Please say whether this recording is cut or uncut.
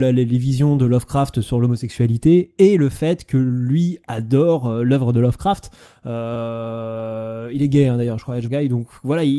cut